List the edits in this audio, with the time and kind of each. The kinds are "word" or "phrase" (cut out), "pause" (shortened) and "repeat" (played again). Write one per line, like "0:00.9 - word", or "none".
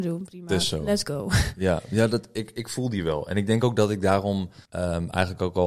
0:04.7 - pause